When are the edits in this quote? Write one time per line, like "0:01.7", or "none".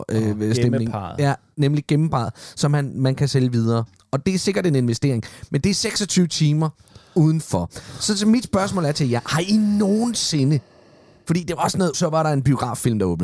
0:11.9